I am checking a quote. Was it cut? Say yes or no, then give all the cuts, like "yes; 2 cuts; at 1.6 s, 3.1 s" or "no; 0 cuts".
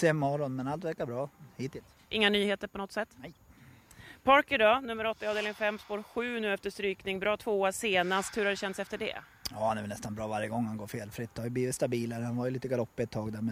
no; 0 cuts